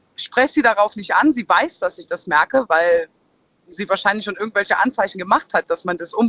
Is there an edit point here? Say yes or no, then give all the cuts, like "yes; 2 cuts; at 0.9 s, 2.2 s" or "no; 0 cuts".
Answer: no; 0 cuts